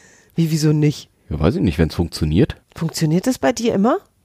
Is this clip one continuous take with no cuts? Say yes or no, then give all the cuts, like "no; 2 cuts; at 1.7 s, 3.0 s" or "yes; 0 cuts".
no; 2 cuts; at 1.2 s, 2.6 s